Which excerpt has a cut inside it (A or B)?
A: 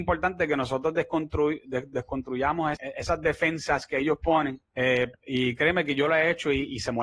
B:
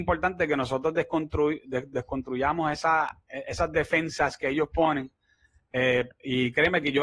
A